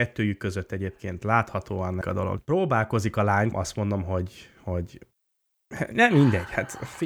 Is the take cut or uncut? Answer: cut